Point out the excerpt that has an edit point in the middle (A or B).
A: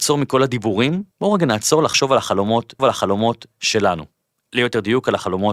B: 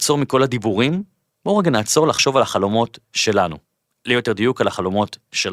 A